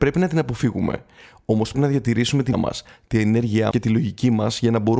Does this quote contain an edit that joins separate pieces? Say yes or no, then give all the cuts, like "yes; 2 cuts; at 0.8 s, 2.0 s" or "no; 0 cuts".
yes; 3 cuts; at 1.7 s, 2.5 s, 3.7 s